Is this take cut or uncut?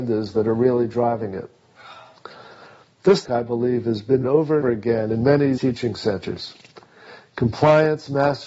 cut